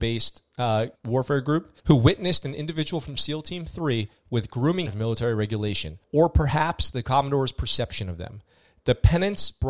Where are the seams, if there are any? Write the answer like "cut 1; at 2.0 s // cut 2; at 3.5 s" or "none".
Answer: cut 1; at 1.0 s // cut 2; at 1.8 s // cut 3; at 4.9 s // cut 4; at 6.0 s